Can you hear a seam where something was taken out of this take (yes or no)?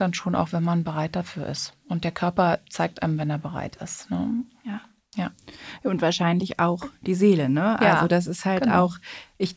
no